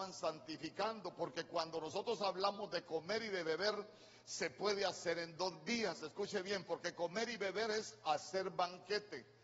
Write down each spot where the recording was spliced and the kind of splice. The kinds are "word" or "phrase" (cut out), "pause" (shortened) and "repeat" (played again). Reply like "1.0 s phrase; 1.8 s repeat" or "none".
none